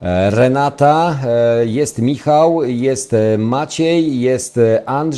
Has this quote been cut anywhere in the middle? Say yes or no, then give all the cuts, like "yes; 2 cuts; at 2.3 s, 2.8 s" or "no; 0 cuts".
no; 0 cuts